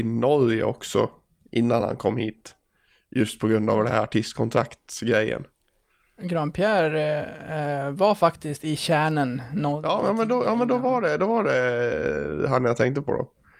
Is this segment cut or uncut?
uncut